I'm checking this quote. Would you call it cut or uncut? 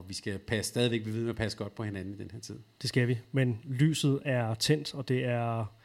uncut